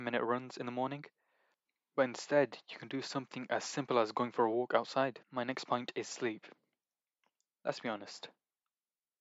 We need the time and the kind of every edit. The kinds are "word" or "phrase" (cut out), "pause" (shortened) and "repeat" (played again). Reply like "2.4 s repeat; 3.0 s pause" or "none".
5.2 s pause